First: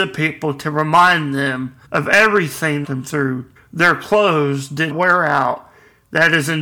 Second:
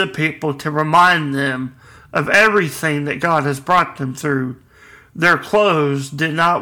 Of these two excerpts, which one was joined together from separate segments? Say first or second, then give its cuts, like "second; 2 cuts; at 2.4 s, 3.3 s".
first; 4 cuts; at 1.8 s, 2.8 s, 3.6 s, 4.9 s